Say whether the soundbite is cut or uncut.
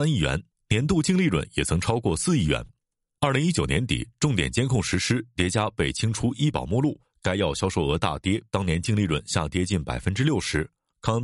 cut